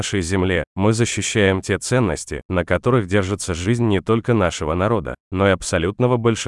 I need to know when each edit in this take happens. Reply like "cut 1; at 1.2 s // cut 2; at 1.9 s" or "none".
none